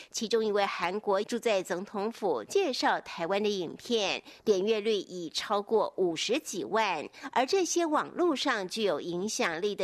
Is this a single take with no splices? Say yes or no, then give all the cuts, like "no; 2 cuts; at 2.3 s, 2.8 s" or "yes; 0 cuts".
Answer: no; 1 cut; at 1.2 s